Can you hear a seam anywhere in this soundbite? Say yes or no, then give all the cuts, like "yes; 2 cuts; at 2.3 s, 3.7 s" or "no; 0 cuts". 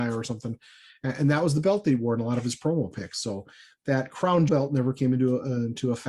yes; 1 cut; at 4.5 s